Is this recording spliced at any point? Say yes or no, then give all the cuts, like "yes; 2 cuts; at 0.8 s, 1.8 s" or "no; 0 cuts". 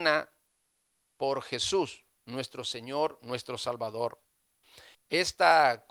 yes; 1 cut; at 4.9 s